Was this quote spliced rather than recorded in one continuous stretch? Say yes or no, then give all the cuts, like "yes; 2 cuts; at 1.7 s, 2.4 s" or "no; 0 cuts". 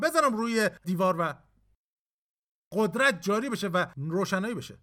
no; 0 cuts